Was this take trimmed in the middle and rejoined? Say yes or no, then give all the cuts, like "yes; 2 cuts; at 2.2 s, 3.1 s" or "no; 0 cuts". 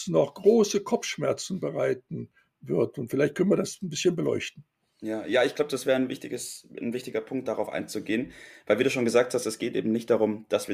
no; 0 cuts